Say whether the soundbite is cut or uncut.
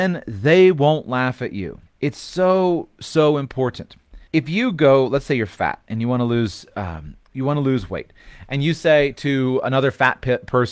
cut